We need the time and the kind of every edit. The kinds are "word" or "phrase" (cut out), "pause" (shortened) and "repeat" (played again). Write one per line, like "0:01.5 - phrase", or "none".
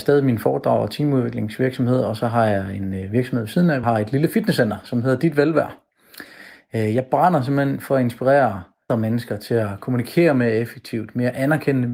0:03.8 - word
0:08.9 - word